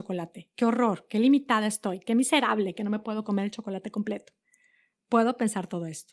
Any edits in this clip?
no; 0 cuts

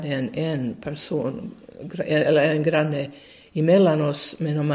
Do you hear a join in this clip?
no; 0 cuts

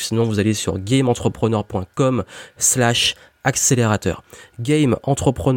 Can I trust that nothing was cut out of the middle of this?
yes; 0 cuts

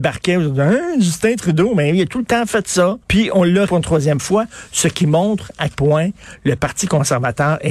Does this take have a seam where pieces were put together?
yes; 3 cuts; at 3.0 s, 3.7 s, 5.7 s

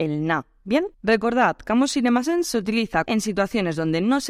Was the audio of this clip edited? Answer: yes; 2 cuts; at 0.9 s, 3.1 s

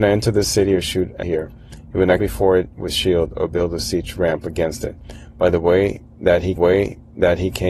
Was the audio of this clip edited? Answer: yes; 3 cuts; at 1.2 s, 2.2 s, 6.6 s

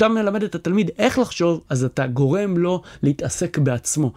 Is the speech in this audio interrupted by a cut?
no; 0 cuts

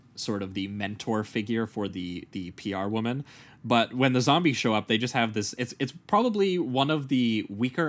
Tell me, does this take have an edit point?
no; 0 cuts

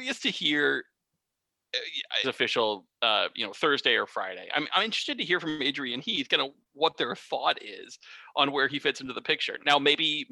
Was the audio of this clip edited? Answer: yes; 1 cut; at 2.2 s

